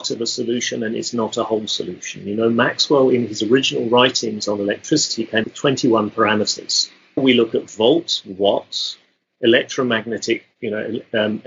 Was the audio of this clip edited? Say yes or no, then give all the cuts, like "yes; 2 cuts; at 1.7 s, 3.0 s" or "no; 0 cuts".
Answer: yes; 2 cuts; at 5.4 s, 7.2 s